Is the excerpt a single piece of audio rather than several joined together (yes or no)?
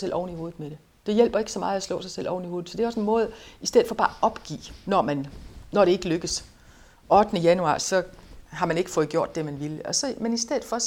yes